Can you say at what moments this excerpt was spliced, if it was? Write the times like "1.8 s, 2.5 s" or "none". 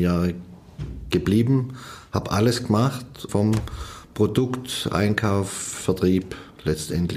3.3 s